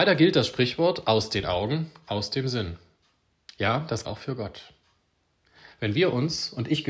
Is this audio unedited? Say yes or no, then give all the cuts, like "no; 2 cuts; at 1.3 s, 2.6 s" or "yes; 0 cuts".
no; 1 cut; at 4.0 s